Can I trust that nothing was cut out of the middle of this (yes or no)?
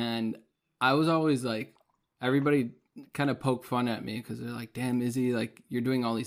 yes